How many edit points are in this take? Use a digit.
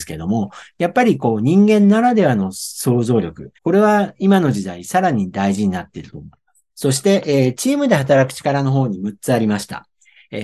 2